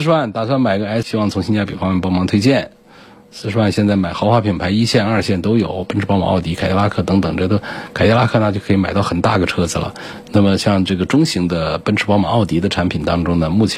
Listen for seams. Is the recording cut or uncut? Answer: cut